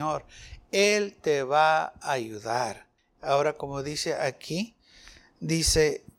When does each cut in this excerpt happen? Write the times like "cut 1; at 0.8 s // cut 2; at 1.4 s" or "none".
none